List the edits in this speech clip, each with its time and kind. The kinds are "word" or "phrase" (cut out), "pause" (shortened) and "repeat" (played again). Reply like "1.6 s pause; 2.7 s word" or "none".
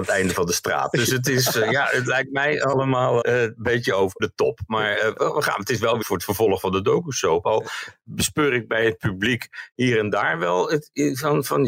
3.2 s word; 4.2 s word; 6.0 s word